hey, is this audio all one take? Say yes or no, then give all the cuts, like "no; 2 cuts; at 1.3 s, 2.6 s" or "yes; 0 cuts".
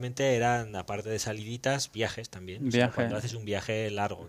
yes; 0 cuts